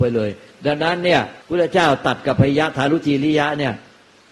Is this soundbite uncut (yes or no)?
no